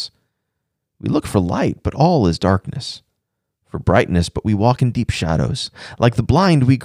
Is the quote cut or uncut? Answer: uncut